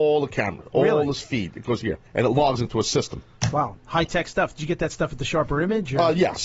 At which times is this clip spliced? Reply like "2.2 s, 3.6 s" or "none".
2.1 s